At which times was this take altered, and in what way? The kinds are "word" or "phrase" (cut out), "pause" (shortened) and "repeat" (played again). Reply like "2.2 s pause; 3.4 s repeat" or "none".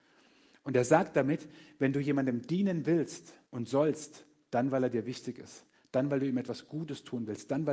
3.5 s pause

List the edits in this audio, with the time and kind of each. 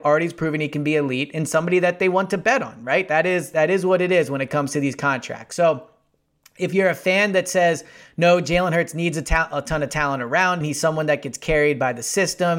10.6 s word

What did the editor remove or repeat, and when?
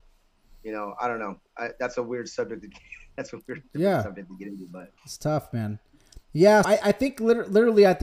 5.0 s pause; 6.6 s word

